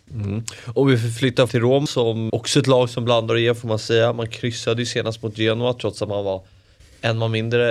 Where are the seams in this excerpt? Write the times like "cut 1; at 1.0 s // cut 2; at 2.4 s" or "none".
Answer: cut 1; at 1.5 s // cut 2; at 1.9 s // cut 3; at 2.3 s